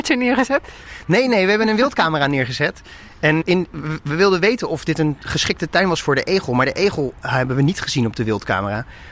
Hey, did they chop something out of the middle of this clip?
yes; 1 cut; at 3.4 s

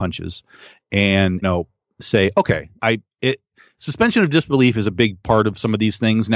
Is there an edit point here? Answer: yes; 2 cuts; at 1.4 s, 2.8 s

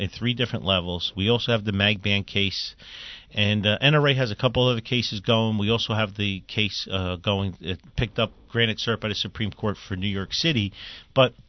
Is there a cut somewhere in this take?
no; 0 cuts

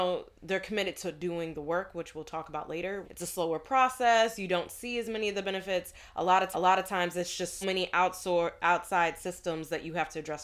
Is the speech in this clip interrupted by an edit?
yes; 3 cuts; at 3.0 s, 6.5 s, 7.6 s

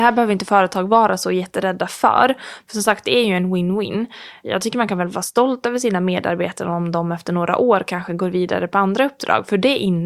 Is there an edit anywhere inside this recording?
no; 0 cuts

